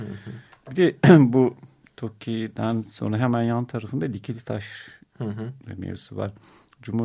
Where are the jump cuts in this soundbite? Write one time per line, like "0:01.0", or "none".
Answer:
0:01.8